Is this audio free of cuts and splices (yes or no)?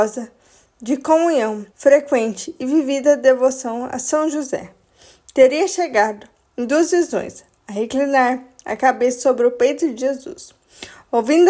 no